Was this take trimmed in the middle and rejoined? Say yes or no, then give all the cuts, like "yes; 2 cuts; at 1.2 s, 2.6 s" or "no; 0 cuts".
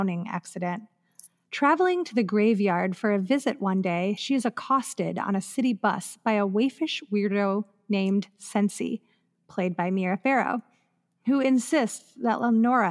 no; 0 cuts